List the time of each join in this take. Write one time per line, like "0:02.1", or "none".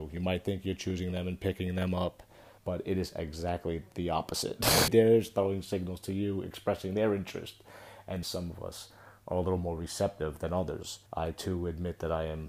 0:02.6
0:04.9
0:08.2
0:11.1